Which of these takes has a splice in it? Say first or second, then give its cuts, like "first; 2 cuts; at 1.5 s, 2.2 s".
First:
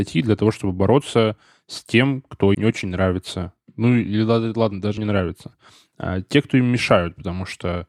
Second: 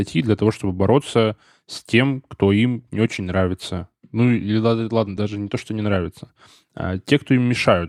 first; 2 cuts; at 2.5 s, 5.0 s